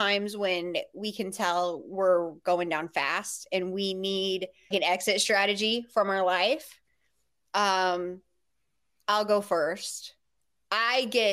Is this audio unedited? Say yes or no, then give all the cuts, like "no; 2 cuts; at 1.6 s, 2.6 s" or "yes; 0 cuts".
no; 1 cut; at 4.7 s